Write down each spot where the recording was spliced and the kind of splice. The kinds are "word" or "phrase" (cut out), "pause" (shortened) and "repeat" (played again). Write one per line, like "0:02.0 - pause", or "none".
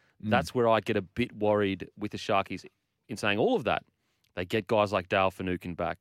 none